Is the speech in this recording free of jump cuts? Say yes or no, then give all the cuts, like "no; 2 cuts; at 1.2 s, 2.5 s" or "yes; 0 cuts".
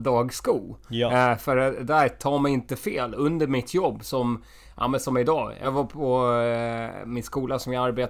yes; 0 cuts